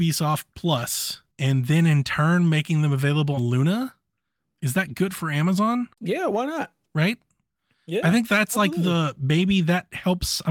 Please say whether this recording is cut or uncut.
cut